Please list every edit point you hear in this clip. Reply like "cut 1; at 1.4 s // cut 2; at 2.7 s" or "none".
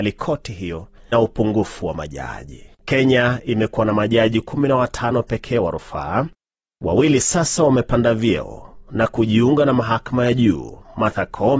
cut 1; at 1.1 s // cut 2; at 2.7 s